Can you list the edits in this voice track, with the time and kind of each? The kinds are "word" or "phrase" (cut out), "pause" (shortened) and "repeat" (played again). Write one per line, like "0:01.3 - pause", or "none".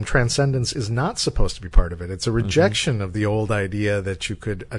none